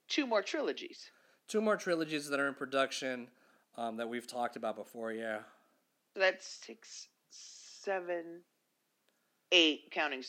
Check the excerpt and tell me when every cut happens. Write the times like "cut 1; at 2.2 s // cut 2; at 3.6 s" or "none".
none